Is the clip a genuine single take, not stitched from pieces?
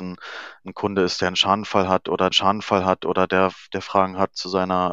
no; 1 cut; at 2.3 s

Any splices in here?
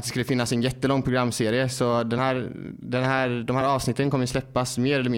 no; 0 cuts

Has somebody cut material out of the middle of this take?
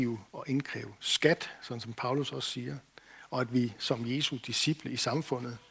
no; 0 cuts

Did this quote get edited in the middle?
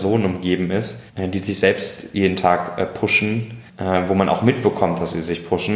yes; 2 cuts; at 1.1 s, 3.7 s

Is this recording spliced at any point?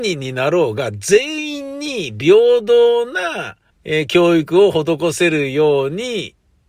yes; 1 cut; at 3.7 s

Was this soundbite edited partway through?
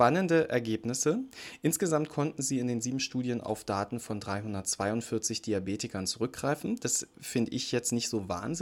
no; 0 cuts

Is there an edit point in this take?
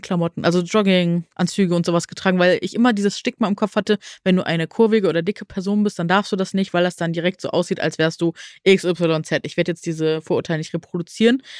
yes; 1 cut; at 1.3 s

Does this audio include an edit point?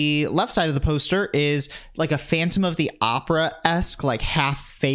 no; 0 cuts

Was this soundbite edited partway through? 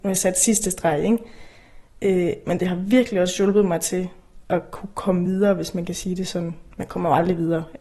no; 0 cuts

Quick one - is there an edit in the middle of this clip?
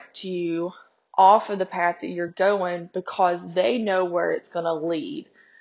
no; 0 cuts

